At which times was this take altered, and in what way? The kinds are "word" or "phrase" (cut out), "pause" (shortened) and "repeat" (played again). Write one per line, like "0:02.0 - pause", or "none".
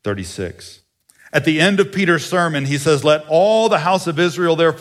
none

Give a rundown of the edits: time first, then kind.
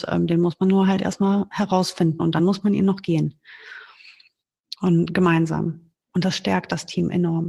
none

